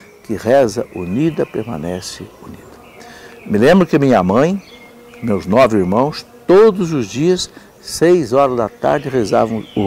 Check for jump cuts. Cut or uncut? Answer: uncut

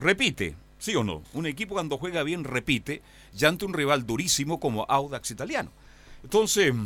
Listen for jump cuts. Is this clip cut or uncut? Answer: uncut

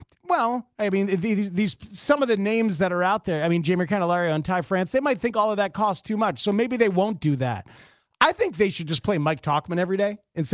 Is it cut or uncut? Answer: uncut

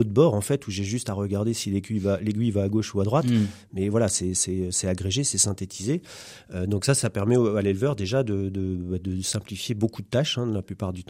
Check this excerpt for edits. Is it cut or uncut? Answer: uncut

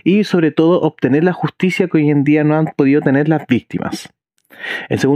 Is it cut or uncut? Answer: uncut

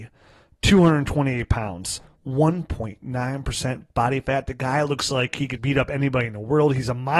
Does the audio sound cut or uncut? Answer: cut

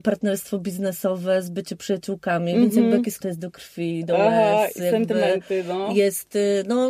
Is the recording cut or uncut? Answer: cut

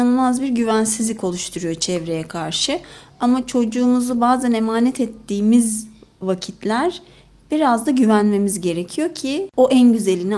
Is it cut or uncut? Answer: uncut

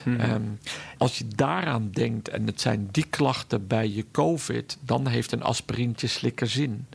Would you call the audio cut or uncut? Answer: cut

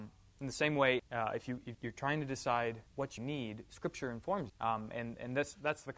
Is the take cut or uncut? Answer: cut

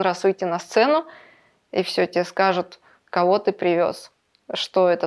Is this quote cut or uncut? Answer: uncut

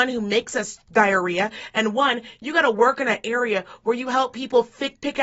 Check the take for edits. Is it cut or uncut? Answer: uncut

